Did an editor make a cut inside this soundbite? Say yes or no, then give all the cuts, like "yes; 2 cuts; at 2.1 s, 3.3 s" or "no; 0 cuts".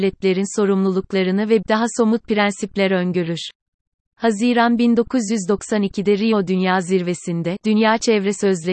yes; 1 cut; at 1.6 s